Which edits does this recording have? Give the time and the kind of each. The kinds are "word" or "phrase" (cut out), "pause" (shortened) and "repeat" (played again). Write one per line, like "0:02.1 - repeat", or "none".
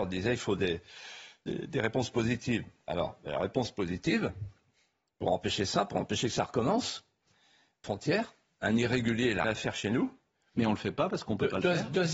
0:07.8 - phrase
0:09.4 - word